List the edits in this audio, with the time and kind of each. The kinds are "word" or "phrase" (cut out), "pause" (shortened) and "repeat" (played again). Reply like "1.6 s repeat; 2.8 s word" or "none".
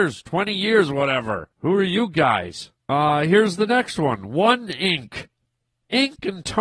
1.5 s pause; 2.8 s pause